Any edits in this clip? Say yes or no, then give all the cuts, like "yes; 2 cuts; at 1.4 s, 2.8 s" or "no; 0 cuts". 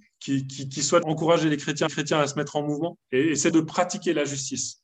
yes; 4 cuts; at 1.0 s, 1.9 s, 3.0 s, 3.5 s